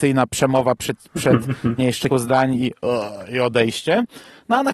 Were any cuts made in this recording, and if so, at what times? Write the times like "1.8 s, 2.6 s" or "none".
1.8 s, 2.1 s